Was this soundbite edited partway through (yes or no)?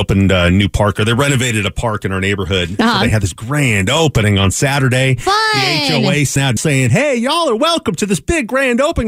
yes